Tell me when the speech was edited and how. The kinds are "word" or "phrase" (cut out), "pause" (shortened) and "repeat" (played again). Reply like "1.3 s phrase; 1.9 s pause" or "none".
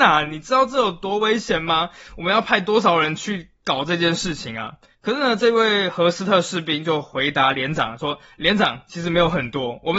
4.9 s pause